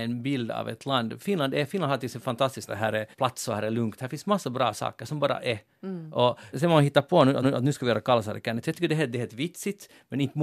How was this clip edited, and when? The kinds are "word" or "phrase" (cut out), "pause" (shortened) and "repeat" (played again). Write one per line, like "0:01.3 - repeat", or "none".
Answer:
0:02.7 - phrase
0:03.1 - pause
0:06.5 - word
0:07.4 - repeat